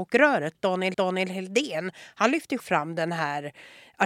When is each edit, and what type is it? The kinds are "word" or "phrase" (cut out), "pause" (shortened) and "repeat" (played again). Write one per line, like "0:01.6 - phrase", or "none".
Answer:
0:00.9 - repeat
0:02.6 - word